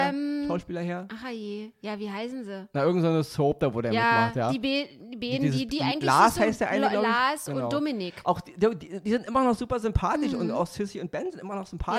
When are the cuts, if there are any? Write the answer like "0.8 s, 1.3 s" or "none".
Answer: none